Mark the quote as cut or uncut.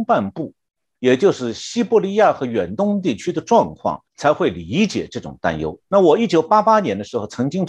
cut